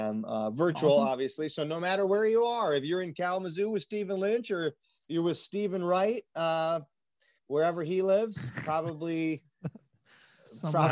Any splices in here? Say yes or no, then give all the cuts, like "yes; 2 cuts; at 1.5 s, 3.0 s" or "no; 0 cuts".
no; 0 cuts